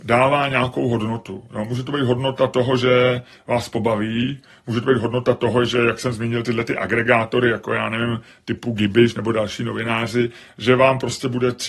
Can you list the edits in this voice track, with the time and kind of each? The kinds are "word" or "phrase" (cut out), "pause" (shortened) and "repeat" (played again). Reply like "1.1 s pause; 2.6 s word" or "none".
none